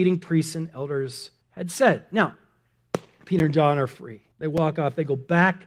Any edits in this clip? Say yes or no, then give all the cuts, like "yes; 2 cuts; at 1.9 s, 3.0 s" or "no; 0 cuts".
yes; 2 cuts; at 1.4 s, 4.3 s